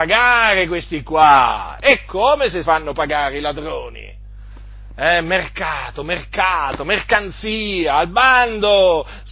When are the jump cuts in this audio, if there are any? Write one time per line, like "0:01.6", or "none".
0:02.6